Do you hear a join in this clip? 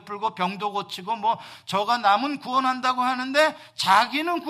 no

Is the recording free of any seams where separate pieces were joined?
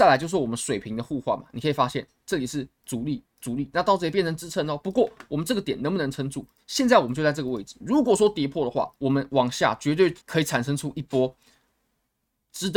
no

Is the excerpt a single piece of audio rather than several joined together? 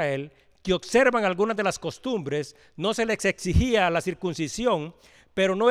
yes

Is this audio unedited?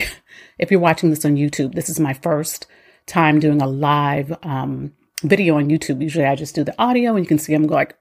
yes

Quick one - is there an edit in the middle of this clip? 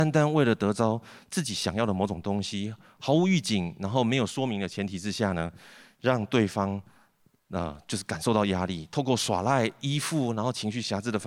no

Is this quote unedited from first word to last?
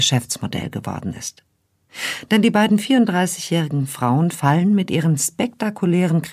yes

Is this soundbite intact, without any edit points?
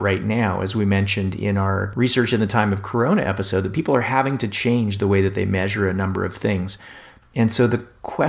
yes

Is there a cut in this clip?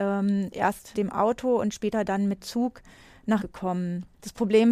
yes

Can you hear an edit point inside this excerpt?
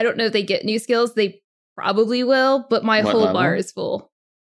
no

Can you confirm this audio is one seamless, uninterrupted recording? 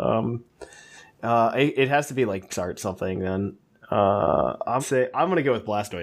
no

